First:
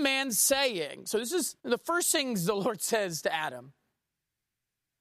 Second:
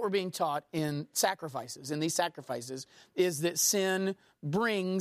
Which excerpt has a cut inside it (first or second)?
first